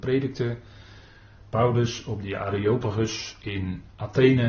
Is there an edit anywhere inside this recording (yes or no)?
no